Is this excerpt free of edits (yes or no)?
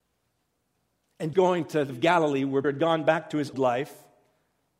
no